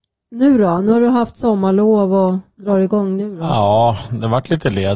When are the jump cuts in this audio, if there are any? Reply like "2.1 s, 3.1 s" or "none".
none